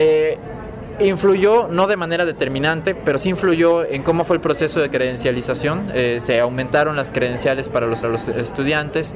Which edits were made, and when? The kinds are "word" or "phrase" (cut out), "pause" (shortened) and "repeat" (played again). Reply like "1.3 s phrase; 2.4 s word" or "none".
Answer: 8.0 s repeat